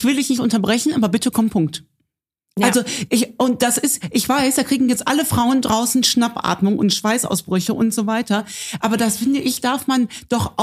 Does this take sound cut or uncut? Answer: cut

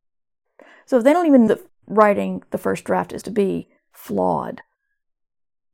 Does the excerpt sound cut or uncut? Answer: cut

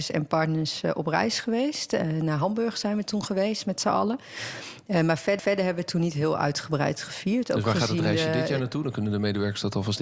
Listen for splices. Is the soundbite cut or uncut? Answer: cut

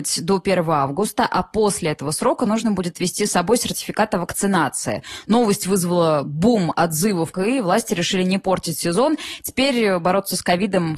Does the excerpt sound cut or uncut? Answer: cut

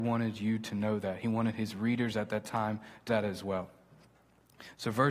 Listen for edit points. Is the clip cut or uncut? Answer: cut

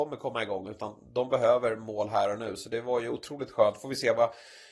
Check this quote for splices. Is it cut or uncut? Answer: uncut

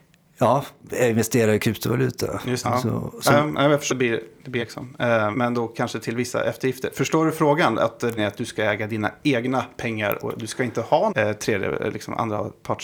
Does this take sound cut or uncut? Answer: cut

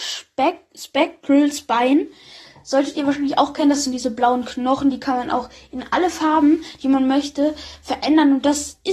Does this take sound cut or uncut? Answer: uncut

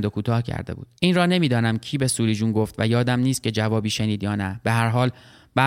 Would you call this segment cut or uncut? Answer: cut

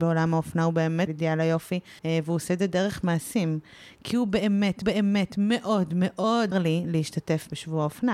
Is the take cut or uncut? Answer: cut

